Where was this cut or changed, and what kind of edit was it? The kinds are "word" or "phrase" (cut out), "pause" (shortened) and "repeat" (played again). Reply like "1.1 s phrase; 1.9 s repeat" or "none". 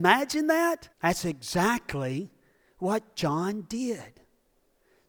0.9 s pause